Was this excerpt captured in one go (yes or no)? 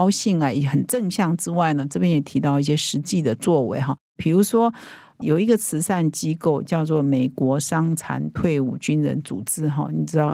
no